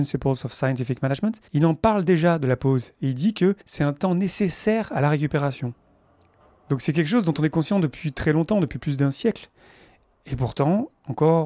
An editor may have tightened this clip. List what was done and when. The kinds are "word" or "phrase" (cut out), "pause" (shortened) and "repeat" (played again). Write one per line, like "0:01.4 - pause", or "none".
0:01.5 - pause
0:03.6 - pause
0:06.1 - pause